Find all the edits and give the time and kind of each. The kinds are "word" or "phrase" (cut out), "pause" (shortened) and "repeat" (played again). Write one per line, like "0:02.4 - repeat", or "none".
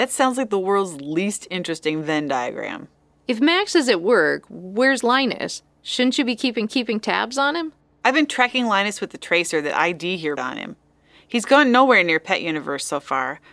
0:06.7 - repeat
0:10.4 - word